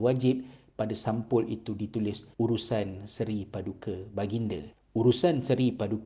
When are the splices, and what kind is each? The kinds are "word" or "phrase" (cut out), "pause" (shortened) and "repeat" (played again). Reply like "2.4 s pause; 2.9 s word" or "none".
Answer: 2.3 s pause